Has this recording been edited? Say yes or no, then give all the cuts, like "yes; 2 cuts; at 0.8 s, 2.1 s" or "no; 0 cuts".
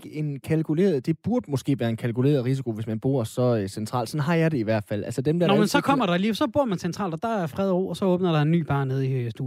no; 0 cuts